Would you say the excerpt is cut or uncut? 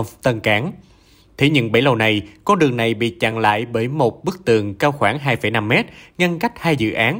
uncut